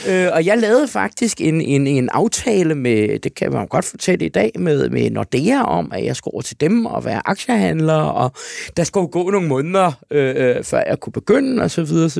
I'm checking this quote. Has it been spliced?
no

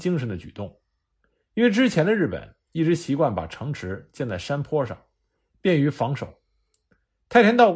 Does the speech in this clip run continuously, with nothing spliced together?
yes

